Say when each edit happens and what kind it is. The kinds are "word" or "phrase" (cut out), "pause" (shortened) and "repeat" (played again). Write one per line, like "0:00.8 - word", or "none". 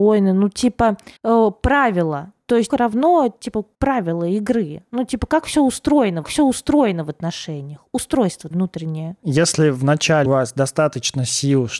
0:01.2 - pause
0:02.7 - phrase
0:03.7 - pause
0:06.2 - repeat
0:08.5 - word
0:10.3 - word